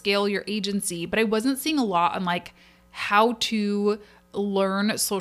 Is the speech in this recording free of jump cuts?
yes; 0 cuts

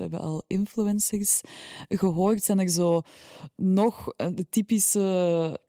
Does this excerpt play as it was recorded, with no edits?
yes; 0 cuts

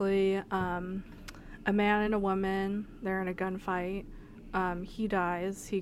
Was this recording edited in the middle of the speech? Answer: no; 0 cuts

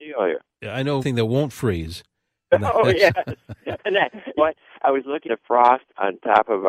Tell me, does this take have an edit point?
yes; 3 cuts; at 1.0 s, 4.4 s, 5.2 s

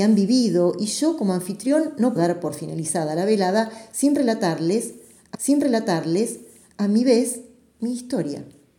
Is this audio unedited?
no; 2 cuts; at 2.2 s, 5.3 s

